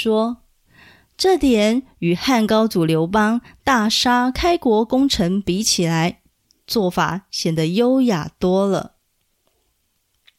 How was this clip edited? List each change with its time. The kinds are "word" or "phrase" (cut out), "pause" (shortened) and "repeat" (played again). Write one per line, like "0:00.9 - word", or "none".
none

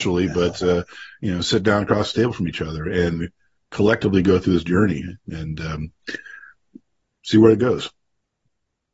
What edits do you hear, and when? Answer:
none

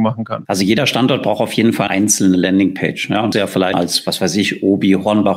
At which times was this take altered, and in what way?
0:01.9 - word
0:03.3 - phrase
0:03.7 - word

